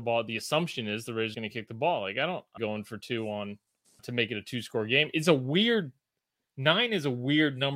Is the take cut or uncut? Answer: cut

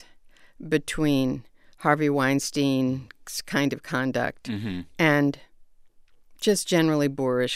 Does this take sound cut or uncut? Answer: uncut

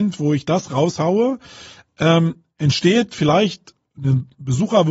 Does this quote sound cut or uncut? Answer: uncut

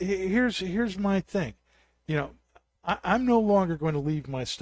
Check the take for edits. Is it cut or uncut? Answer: uncut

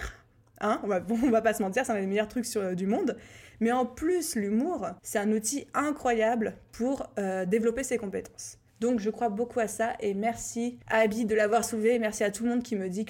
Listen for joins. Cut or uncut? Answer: cut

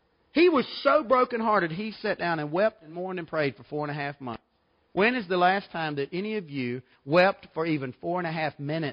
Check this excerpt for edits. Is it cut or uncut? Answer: uncut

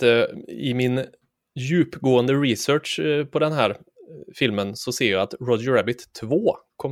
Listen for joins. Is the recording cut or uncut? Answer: uncut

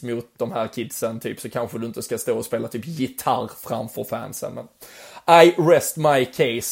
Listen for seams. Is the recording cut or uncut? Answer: uncut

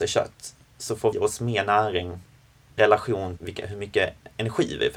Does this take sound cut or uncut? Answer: cut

